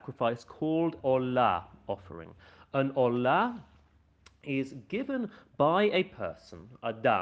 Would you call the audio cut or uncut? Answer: cut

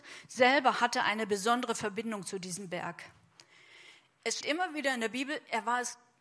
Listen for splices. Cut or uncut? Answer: cut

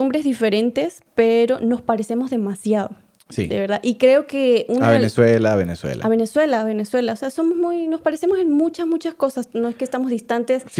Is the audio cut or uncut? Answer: uncut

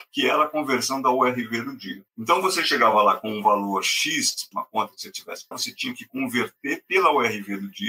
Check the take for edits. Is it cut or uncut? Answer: cut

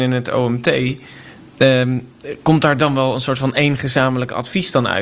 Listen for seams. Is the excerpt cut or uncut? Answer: uncut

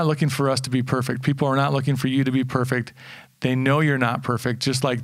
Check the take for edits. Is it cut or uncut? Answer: uncut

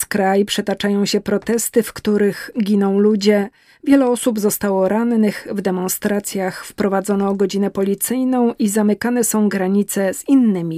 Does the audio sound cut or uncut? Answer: uncut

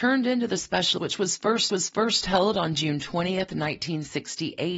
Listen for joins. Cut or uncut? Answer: cut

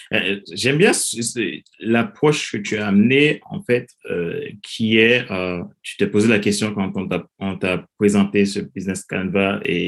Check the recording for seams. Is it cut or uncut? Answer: uncut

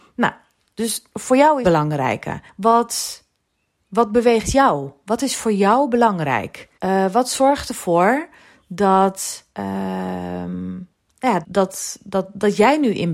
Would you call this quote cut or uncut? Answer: cut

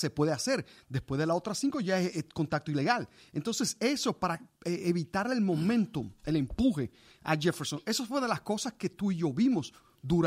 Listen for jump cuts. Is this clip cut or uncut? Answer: uncut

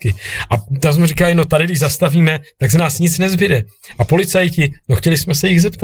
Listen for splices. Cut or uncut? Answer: uncut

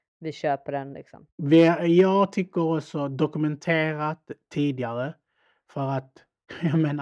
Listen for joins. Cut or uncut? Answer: uncut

